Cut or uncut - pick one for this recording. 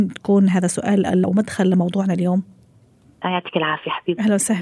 cut